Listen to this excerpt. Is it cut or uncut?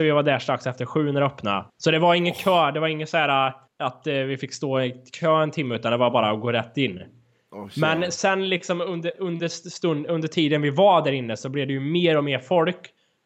cut